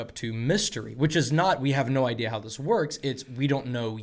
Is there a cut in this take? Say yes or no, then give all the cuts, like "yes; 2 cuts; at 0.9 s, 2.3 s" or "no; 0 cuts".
no; 0 cuts